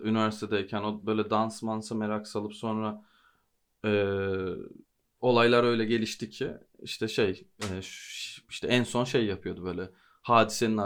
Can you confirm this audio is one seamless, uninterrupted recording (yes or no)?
no